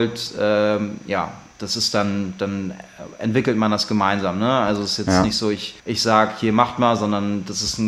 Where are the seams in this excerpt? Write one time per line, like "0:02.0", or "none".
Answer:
0:05.8